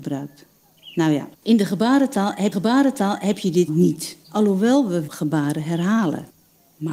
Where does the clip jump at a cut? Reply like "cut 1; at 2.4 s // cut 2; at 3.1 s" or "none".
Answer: cut 1; at 1.3 s // cut 2; at 2.5 s // cut 3; at 3.7 s // cut 4; at 4.2 s // cut 5; at 5.1 s